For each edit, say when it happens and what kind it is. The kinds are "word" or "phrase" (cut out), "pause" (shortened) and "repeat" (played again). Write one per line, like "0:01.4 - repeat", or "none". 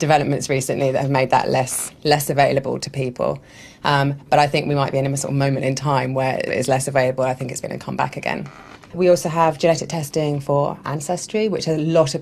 0:01.9 - pause
0:06.5 - word
0:07.6 - word